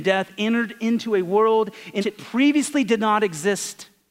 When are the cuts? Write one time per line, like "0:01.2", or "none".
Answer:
0:02.0